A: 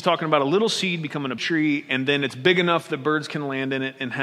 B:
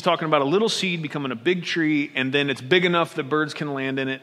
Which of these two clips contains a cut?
A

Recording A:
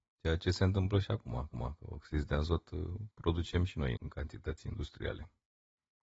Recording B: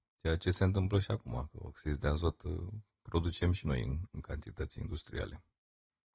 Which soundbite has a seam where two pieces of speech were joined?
A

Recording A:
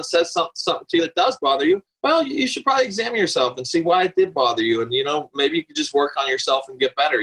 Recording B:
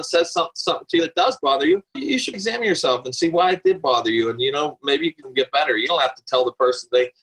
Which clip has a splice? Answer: B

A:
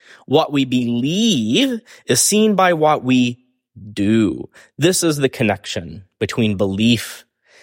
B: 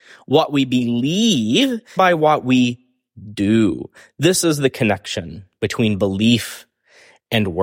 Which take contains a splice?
B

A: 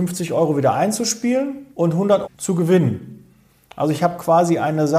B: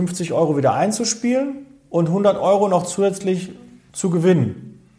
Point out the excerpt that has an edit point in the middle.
A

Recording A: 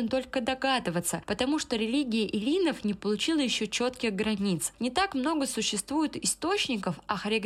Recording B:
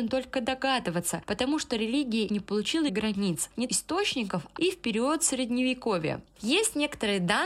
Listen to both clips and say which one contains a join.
B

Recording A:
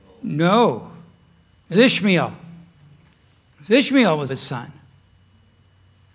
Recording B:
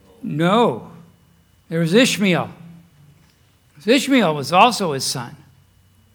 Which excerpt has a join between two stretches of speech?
A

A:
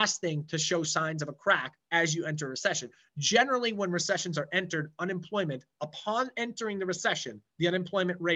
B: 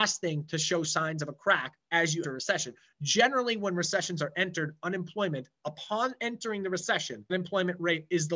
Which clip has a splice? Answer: B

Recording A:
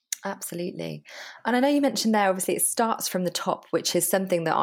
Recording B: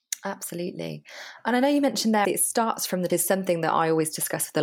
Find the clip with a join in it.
B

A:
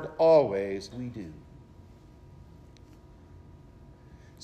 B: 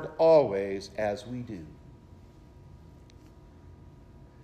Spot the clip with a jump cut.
A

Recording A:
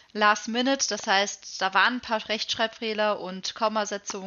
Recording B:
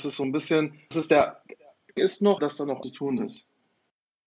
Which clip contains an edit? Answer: B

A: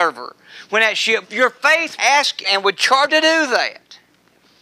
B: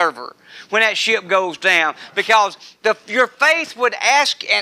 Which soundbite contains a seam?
A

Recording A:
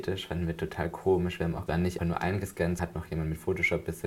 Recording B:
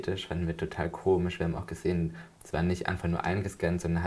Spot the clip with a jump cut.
A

